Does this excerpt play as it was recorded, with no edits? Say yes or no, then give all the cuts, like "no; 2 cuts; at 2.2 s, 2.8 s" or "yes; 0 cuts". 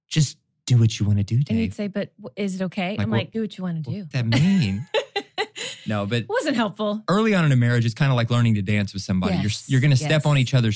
no; 2 cuts; at 3.3 s, 4.1 s